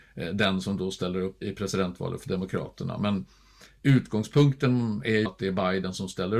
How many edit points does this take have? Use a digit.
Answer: 2